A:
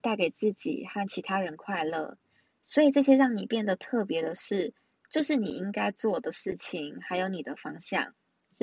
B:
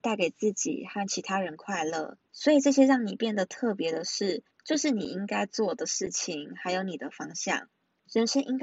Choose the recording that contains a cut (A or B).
B